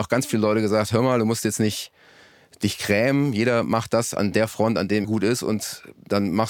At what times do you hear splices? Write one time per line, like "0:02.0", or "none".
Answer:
0:05.0